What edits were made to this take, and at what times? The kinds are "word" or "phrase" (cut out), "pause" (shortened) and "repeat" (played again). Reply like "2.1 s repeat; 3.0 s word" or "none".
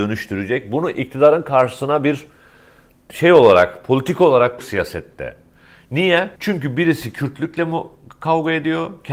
4.6 s phrase; 6.4 s pause